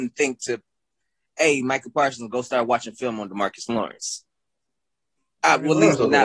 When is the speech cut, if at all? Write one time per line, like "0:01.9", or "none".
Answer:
none